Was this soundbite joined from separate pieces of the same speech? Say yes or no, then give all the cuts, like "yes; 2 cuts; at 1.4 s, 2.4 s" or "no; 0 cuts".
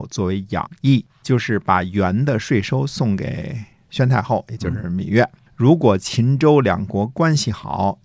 yes; 2 cuts; at 1.1 s, 5.5 s